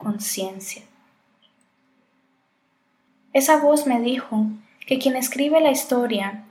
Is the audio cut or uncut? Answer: uncut